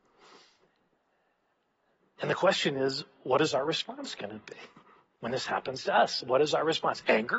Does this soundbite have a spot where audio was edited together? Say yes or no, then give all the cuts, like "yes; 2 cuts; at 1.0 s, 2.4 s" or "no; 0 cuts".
no; 0 cuts